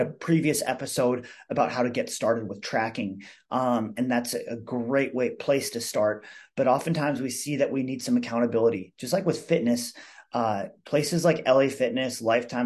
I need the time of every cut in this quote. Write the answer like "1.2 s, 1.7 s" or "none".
10.8 s